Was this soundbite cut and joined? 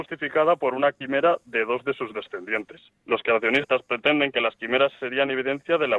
yes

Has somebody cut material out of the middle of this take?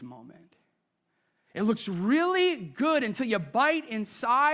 no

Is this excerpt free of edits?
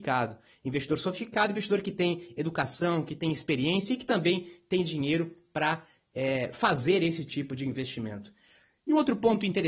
yes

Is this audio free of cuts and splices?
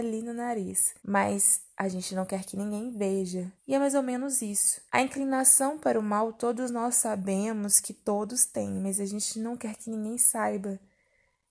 no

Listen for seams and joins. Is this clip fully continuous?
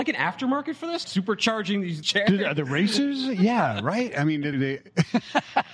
no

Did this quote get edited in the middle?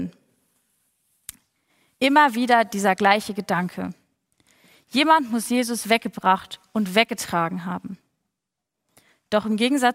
no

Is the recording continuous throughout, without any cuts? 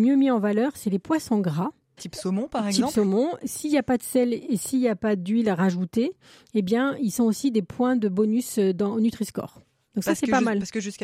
yes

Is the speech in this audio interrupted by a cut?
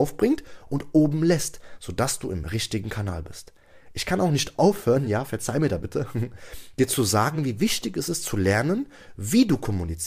no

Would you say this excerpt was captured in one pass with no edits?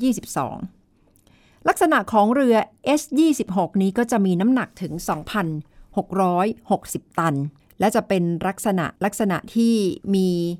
no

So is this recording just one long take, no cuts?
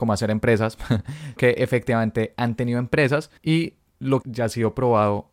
no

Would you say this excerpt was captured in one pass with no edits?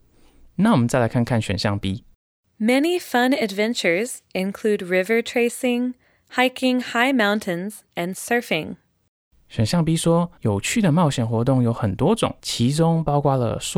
no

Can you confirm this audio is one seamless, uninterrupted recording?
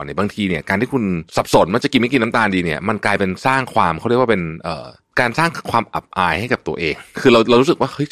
no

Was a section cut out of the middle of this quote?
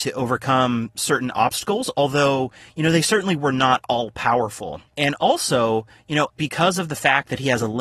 yes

